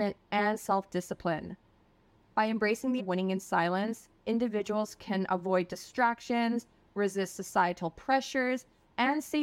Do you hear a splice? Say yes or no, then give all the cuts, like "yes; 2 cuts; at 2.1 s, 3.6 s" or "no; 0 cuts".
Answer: yes; 1 cut; at 3.0 s